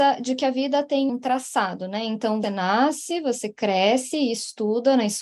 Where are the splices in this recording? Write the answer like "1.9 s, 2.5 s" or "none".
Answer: 1.1 s, 2.4 s